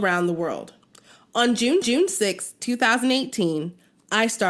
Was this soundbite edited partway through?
yes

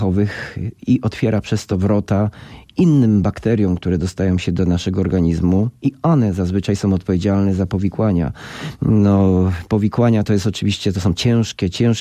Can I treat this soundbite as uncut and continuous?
yes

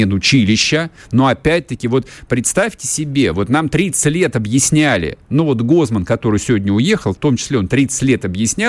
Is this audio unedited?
yes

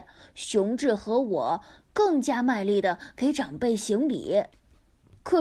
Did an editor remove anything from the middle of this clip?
no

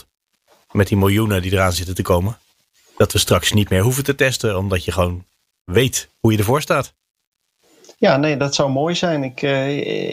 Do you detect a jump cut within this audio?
no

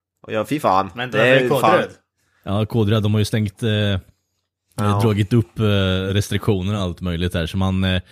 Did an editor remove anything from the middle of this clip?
no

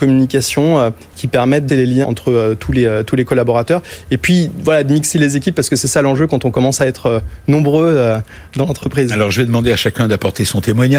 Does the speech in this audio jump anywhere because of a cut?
yes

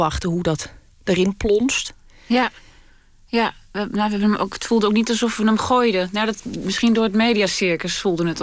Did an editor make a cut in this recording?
no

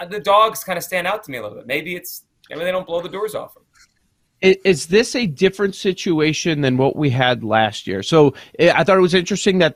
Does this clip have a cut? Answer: no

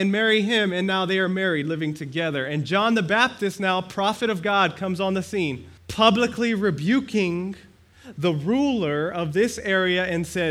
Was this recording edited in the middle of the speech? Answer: yes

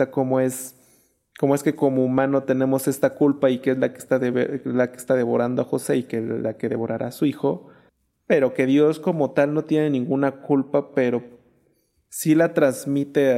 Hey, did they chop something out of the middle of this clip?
yes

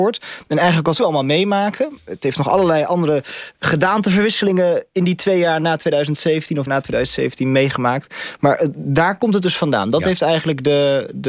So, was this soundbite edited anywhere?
yes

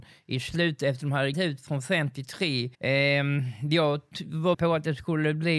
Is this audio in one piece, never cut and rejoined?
no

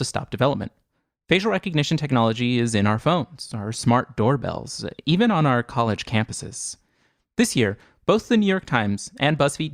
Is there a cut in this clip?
no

